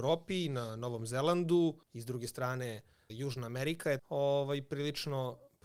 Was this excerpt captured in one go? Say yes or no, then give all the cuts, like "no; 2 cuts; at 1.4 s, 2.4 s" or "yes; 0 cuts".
no; 3 cuts; at 1.8 s, 3.1 s, 4.0 s